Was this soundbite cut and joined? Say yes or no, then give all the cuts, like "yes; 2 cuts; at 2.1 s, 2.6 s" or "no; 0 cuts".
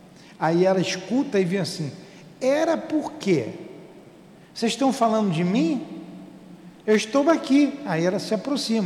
no; 0 cuts